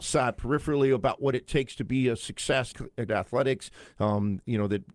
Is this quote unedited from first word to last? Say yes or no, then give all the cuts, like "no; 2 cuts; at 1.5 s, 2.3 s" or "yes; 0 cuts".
no; 2 cuts; at 2.7 s, 3.1 s